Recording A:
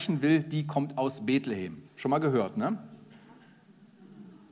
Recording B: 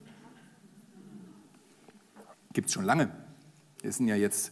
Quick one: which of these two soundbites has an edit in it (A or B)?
A